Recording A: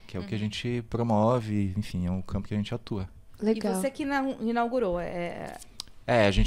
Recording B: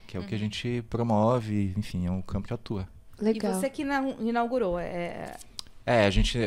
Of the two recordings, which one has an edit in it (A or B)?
B